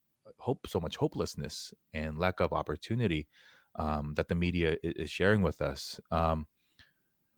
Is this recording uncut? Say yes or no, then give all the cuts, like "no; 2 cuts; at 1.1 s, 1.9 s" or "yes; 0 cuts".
yes; 0 cuts